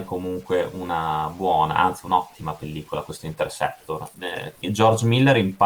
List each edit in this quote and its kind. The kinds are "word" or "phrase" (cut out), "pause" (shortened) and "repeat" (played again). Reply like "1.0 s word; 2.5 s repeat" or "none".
4.6 s pause